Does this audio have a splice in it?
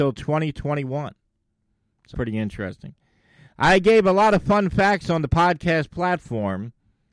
yes; 1 cut; at 2.1 s

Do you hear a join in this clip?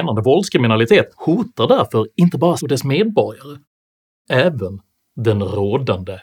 yes; 3 cuts; at 1.1 s, 2.6 s, 4.3 s

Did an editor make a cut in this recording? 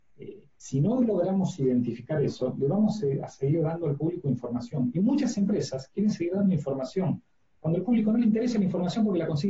no; 0 cuts

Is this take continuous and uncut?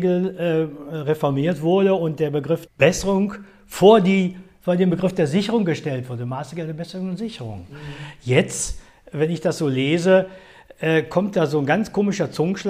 no; 1 cut; at 2.7 s

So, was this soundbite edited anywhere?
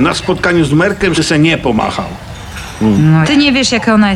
yes; 2 cuts; at 1.2 s, 3.2 s

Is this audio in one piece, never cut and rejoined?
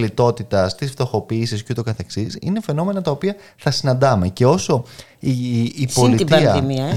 yes; 0 cuts

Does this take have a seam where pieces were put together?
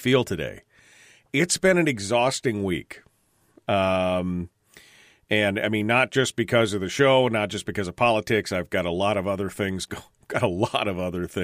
no; 0 cuts

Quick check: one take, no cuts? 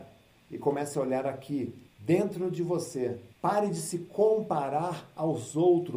no; 2 cuts; at 1.9 s, 3.3 s

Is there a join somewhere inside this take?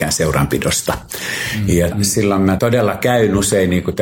yes; 2 cuts; at 1.9 s, 2.6 s

